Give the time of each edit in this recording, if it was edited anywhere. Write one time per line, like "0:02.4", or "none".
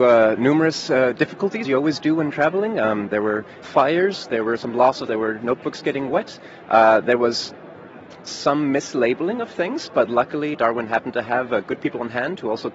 0:01.6
0:03.6
0:04.6
0:05.1
0:10.5